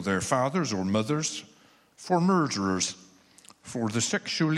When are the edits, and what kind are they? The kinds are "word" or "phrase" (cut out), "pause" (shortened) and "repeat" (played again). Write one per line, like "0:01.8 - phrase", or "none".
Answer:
none